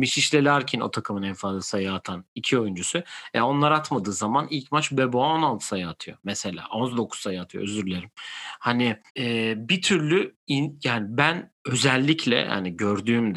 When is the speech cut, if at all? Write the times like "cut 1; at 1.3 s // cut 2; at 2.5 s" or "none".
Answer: cut 1; at 9.1 s // cut 2; at 11.6 s